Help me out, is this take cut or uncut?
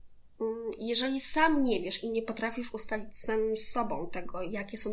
uncut